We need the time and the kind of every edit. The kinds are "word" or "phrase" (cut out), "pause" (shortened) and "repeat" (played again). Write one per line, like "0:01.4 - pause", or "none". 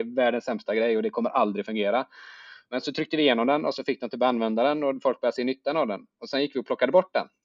none